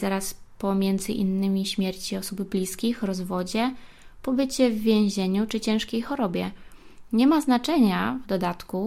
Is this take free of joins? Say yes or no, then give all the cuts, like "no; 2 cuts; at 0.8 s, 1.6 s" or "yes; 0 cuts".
yes; 0 cuts